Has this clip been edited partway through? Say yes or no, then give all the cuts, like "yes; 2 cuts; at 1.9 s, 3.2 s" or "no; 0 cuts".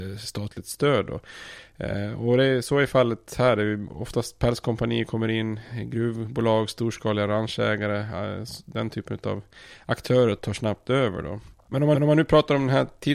yes; 3 cuts; at 10.4 s, 11.5 s, 11.9 s